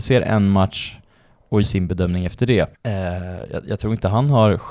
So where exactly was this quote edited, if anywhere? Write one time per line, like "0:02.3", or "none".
0:01.6
0:02.7